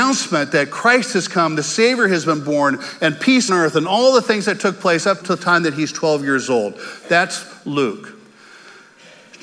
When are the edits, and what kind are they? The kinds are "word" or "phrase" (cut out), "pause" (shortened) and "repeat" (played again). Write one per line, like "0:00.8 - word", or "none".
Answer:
0:03.5 - word
0:05.2 - word